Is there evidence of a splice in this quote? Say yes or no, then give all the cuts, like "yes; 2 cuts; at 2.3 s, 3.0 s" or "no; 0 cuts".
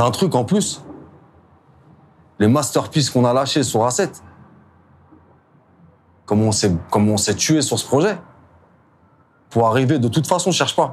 no; 0 cuts